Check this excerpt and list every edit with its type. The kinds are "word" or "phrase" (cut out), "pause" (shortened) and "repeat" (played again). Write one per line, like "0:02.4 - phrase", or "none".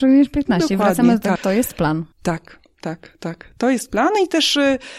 0:01.4 - word
0:02.1 - pause